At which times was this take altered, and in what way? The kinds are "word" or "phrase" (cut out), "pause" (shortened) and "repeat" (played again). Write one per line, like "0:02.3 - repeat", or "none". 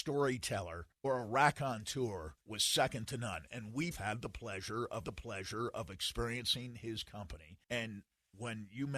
0:00.9 - pause
0:02.4 - pause
0:03.9 - word
0:05.0 - repeat
0:07.6 - pause